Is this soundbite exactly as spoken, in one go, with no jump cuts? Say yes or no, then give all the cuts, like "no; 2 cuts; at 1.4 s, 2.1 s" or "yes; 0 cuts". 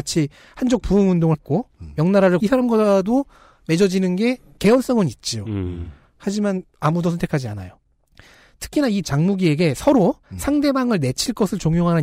no; 4 cuts; at 1.3 s, 2.4 s, 9.0 s, 10.2 s